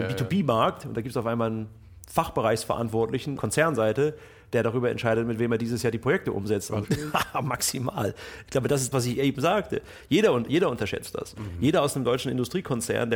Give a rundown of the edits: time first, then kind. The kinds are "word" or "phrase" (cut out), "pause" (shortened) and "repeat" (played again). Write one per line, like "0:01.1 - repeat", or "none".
0:03.4 - word
0:06.8 - phrase
0:08.9 - word

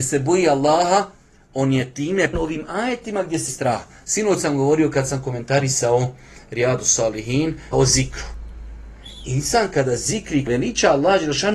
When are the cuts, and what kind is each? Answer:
0:02.3 - word
0:03.5 - word
0:07.7 - word
0:10.5 - word

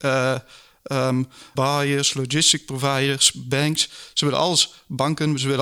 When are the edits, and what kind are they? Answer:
0:01.6 - word

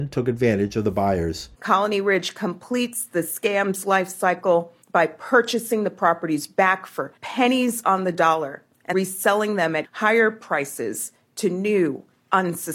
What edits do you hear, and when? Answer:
0:01.5 - pause
0:04.8 - pause
0:07.2 - pause
0:08.9 - word
0:09.8 - word

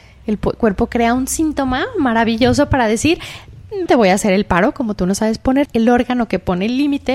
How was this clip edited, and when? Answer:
0:03.9 - word
0:05.7 - word

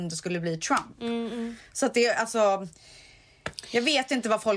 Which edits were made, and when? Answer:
none

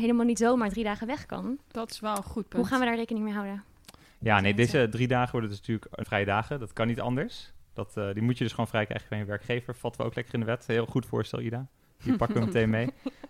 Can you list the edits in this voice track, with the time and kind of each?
0:06.0 - word

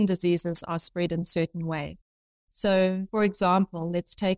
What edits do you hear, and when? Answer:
none

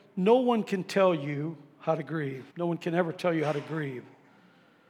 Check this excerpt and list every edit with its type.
0:02.5 - pause

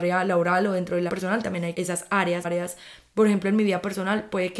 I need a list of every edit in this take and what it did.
0:01.1 - word
0:01.7 - word
0:02.4 - word

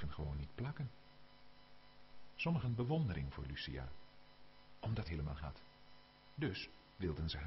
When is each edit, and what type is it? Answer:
0:02.6 - phrase
0:05.0 - word
0:05.4 - phrase

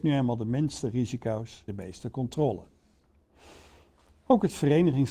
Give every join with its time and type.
0:01.7 - word

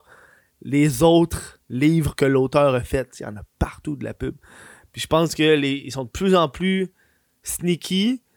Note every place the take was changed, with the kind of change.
none

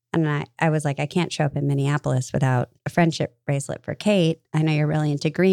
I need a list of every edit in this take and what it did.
0:02.8 - pause

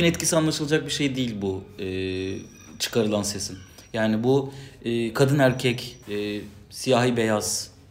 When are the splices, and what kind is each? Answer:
0:06.0 - pause

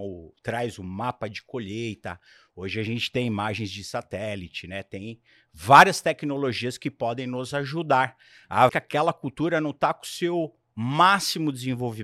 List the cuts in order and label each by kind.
0:08.7 - word

